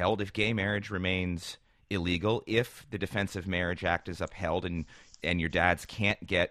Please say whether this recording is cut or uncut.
uncut